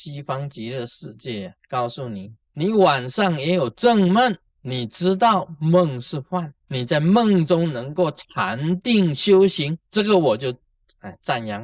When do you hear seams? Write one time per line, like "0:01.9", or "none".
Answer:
0:01.6
0:02.4
0:04.5
0:06.6
0:09.8